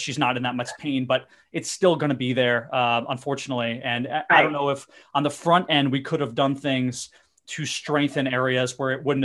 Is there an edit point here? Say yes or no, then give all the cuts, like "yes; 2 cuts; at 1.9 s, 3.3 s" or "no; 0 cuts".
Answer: no; 0 cuts